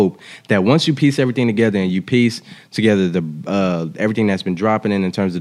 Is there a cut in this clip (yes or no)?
no